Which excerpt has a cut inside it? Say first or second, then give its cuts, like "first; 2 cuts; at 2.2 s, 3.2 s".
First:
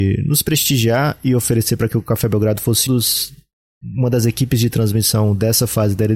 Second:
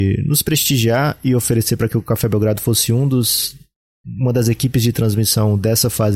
first; 1 cut; at 2.9 s